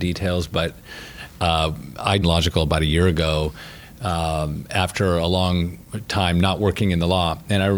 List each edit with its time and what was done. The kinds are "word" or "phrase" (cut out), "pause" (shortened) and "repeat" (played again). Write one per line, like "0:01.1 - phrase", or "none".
0:02.2 - phrase